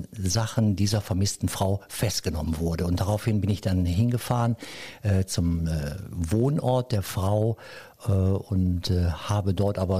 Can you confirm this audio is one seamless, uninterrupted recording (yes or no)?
yes